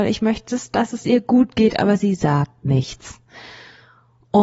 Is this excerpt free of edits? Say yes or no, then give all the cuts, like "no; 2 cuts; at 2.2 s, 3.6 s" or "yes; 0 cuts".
yes; 0 cuts